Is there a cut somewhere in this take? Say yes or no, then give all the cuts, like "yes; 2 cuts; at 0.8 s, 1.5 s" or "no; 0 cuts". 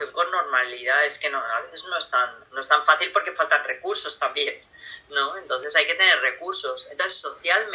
no; 0 cuts